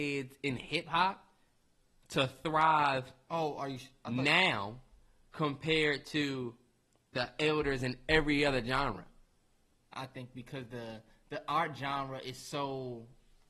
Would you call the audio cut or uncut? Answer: uncut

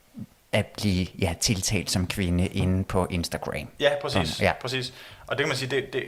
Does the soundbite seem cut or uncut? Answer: uncut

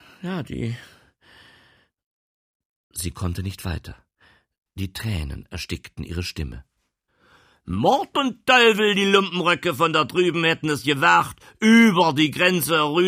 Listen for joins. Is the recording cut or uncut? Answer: uncut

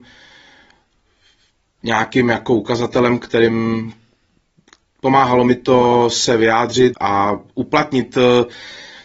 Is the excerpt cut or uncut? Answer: cut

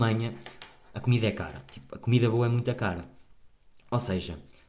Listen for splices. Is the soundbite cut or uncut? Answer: uncut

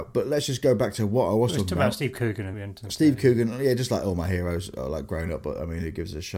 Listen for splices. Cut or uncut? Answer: cut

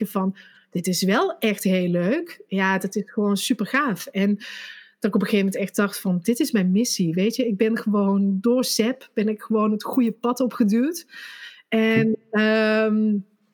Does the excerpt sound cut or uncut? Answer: uncut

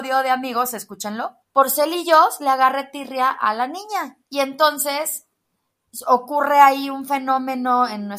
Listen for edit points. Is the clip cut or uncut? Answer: cut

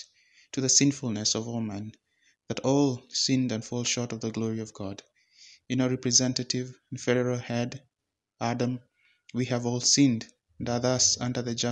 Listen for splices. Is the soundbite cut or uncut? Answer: uncut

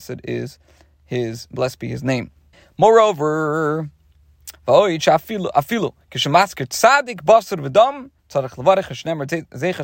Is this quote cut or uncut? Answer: cut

